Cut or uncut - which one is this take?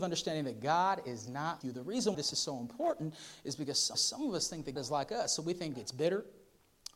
cut